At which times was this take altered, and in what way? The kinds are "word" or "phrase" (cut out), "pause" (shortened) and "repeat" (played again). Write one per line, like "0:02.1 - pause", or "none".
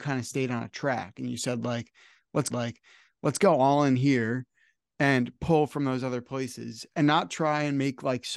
0:02.5 - repeat